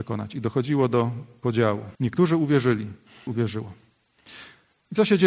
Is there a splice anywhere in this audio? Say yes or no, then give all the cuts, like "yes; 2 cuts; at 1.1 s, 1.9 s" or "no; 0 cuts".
yes; 2 cuts; at 1.9 s, 3.3 s